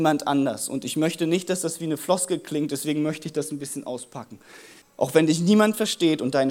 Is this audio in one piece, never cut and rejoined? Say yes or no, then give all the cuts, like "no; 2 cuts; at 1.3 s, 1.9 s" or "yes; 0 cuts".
no; 1 cut; at 4.8 s